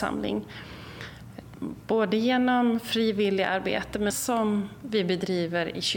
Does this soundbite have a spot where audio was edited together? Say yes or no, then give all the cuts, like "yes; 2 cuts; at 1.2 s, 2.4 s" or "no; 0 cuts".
yes; 1 cut; at 4.1 s